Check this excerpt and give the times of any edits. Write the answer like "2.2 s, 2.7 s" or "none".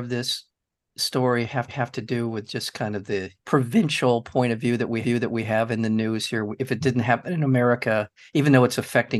1.7 s, 3.4 s, 5.0 s